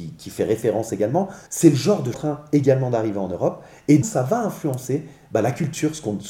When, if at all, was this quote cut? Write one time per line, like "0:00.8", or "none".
0:01.5
0:02.1
0:04.0